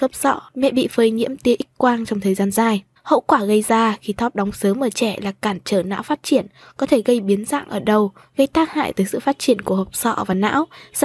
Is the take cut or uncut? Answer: uncut